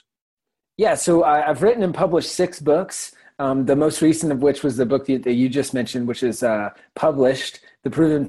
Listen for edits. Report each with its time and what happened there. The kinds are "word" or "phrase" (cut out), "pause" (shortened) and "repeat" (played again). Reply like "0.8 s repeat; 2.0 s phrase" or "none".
none